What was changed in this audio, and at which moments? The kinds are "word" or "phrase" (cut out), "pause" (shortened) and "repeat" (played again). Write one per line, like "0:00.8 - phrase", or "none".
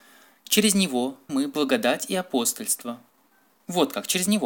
0:01.3 - word